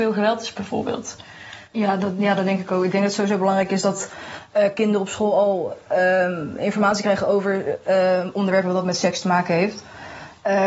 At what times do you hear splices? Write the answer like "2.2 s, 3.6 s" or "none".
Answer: none